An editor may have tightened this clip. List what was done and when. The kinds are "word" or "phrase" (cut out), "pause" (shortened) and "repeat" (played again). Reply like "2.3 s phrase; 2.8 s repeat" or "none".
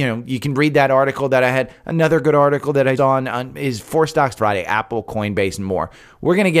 3.0 s word; 4.4 s phrase